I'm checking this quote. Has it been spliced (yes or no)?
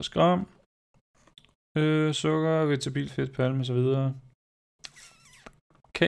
yes